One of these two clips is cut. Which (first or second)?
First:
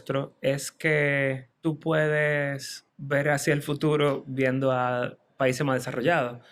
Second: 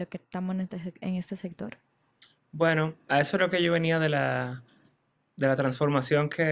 first